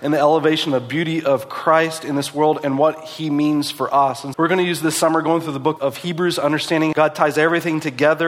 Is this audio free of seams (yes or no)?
no